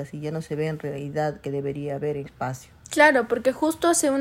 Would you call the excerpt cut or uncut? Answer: cut